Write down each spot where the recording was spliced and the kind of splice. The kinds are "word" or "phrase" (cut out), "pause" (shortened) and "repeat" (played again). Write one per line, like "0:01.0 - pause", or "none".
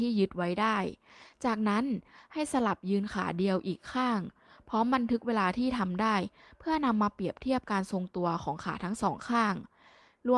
none